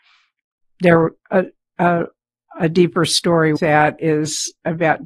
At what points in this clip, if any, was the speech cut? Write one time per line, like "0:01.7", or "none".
0:01.2
0:03.6

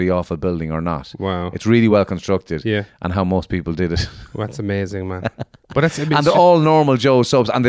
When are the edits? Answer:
none

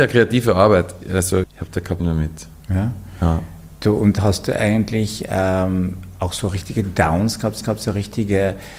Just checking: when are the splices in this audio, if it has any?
0:01.4
0:02.0
0:07.6

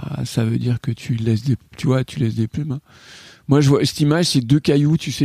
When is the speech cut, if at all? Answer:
none

